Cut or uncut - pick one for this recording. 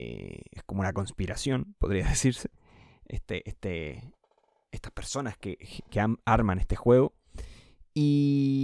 uncut